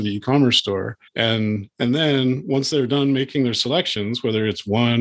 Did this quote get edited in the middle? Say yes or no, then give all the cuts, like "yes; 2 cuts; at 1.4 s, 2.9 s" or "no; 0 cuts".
yes; 1 cut; at 1.1 s